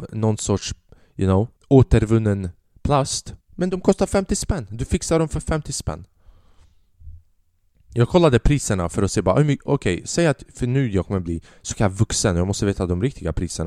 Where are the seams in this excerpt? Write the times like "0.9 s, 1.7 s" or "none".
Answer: 1.6 s, 3.4 s